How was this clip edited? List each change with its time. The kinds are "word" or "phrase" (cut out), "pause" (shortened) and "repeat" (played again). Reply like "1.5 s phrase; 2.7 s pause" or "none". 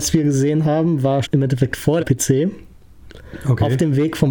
1.2 s word; 2.0 s word